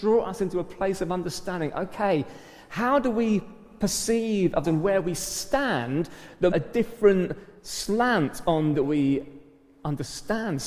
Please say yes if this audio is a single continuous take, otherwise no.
no